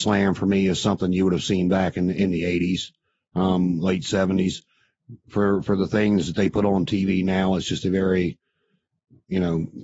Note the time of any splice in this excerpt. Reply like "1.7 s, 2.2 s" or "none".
none